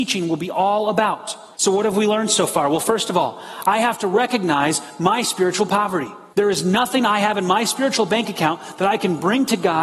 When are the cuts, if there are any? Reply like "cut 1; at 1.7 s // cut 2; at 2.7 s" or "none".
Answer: cut 1; at 1.5 s // cut 2; at 6.3 s